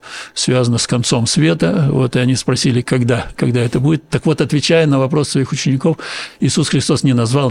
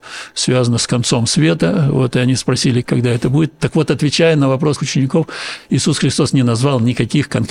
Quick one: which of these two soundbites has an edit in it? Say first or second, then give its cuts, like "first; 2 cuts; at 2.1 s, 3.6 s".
second; 2 cuts; at 2.8 s, 4.8 s